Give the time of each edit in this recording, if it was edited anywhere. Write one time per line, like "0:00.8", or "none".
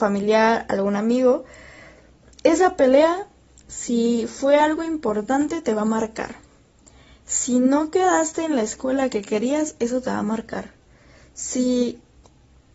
none